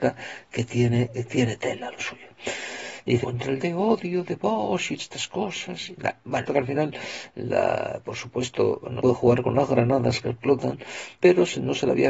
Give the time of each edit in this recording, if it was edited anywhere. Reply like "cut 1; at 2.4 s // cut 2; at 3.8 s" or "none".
cut 1; at 1.3 s // cut 2; at 3.2 s // cut 3; at 3.6 s // cut 4; at 5.0 s // cut 5; at 6.5 s // cut 6; at 9.0 s // cut 7; at 11.2 s